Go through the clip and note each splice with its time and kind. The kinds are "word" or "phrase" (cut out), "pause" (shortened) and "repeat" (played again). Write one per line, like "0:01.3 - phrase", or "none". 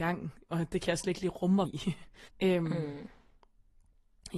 0:01.6 - phrase
0:02.3 - pause